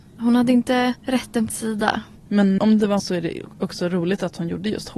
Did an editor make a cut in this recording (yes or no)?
yes